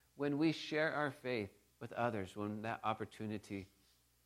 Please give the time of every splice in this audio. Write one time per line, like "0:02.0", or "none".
0:01.7